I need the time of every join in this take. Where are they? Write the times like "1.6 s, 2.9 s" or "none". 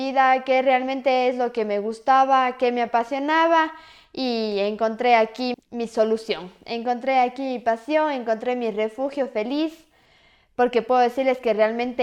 5.5 s